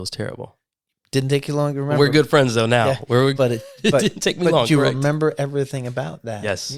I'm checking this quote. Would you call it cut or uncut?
cut